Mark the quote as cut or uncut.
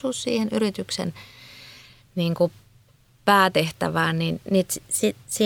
uncut